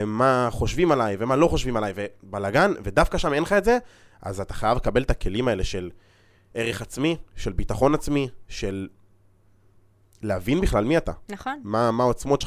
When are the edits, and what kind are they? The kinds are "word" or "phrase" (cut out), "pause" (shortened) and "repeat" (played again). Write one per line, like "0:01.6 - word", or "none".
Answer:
none